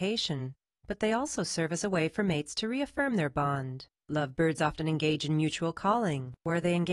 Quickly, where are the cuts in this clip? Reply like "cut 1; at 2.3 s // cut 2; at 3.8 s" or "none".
cut 1; at 4.0 s

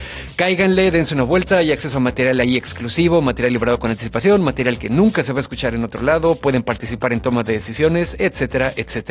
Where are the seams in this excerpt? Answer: none

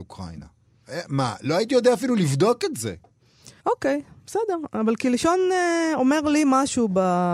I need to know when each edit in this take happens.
cut 1; at 3.6 s

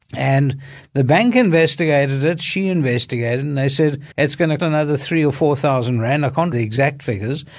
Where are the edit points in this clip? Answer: cut 1; at 4.1 s // cut 2; at 4.6 s // cut 3; at 6.5 s

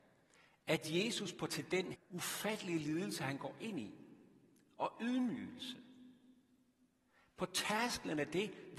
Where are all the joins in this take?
cut 1; at 1.5 s // cut 2; at 1.9 s

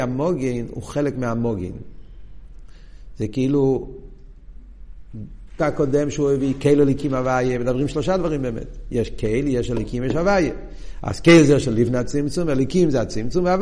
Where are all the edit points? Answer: cut 1; at 5.6 s

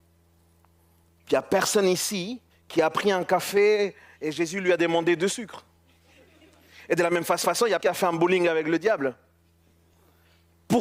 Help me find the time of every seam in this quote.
cut 1; at 2.5 s // cut 2; at 7.4 s // cut 3; at 7.8 s

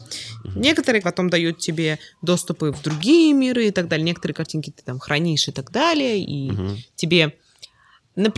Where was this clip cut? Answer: cut 1; at 1.0 s

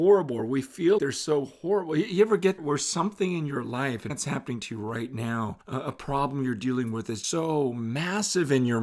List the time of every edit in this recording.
cut 1; at 1.0 s // cut 2; at 2.6 s // cut 3; at 4.1 s // cut 4; at 5.6 s // cut 5; at 7.2 s

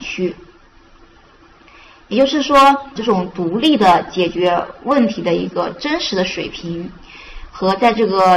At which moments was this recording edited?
cut 1; at 3.0 s

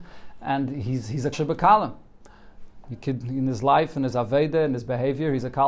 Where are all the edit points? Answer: cut 1; at 1.3 s

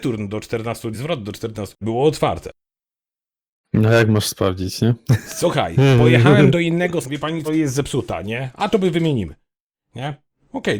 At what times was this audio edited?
cut 1; at 0.9 s // cut 2; at 1.8 s // cut 3; at 7.0 s // cut 4; at 7.5 s

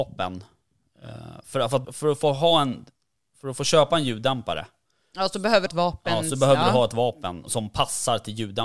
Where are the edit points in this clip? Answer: cut 1; at 1.8 s // cut 2; at 5.7 s // cut 3; at 7.5 s

